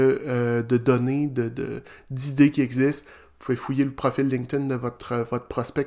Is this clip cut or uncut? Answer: uncut